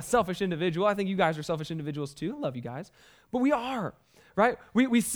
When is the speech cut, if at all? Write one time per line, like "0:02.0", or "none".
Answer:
none

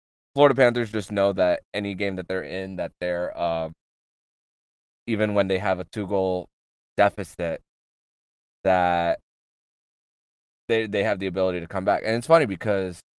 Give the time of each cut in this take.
none

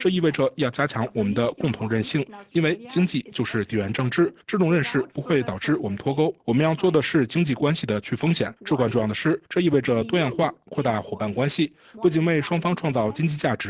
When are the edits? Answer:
0:04.4
0:06.4
0:08.6
0:09.5

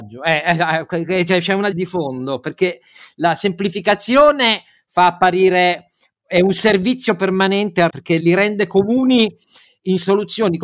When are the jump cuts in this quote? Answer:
0:01.7
0:07.9
0:08.2

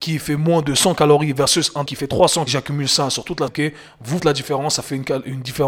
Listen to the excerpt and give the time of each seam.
0:01.9
0:02.5
0:03.5
0:04.2

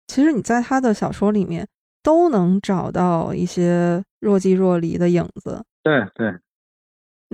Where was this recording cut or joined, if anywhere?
0:04.1
0:05.7

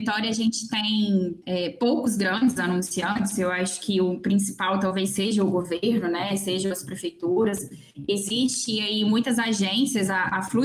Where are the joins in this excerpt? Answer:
0:01.4

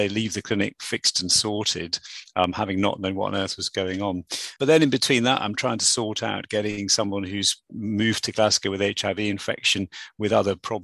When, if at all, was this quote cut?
0:04.6

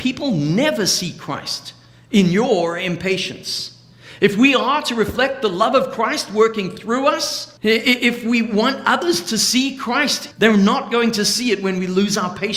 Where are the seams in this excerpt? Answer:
0:07.6
0:10.3

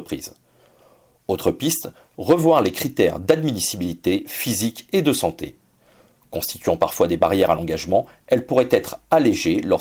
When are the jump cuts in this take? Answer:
none

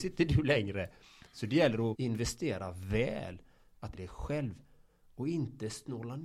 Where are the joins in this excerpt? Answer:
0:01.9
0:03.9

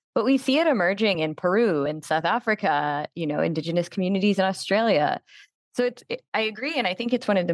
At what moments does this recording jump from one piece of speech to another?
none

